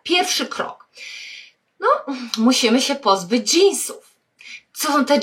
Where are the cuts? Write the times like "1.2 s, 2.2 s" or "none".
none